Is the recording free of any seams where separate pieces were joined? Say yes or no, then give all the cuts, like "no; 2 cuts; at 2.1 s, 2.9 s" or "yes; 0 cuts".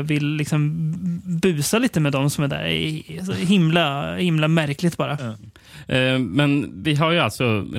yes; 0 cuts